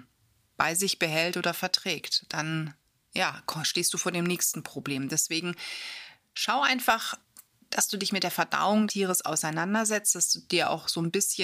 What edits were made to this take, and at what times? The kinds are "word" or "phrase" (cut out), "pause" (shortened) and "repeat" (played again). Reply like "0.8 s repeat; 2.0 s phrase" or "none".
8.9 s word